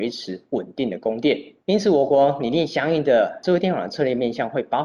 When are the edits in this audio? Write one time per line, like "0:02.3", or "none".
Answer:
0:01.6